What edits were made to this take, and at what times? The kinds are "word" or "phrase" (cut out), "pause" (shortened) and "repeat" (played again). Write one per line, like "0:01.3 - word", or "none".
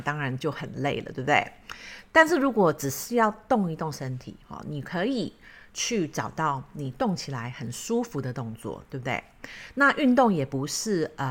0:04.4 - pause